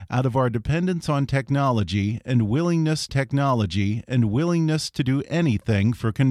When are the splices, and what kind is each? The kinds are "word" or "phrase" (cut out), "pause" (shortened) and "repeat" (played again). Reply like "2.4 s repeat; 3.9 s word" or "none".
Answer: 3.1 s repeat